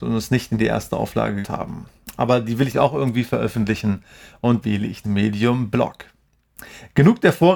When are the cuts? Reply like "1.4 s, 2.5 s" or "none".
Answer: 1.4 s, 2.7 s, 4.6 s, 5.0 s